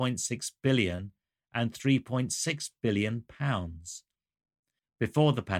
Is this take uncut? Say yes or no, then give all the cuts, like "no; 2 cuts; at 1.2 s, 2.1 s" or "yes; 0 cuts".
yes; 0 cuts